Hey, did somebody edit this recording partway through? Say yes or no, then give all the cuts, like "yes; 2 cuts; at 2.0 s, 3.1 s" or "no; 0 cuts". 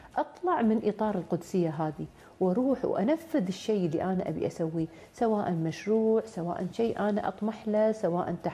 no; 0 cuts